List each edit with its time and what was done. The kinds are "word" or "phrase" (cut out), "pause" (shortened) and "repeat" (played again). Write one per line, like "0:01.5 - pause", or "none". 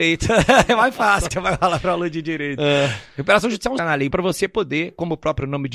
0:01.3 - word
0:03.8 - phrase
0:04.1 - word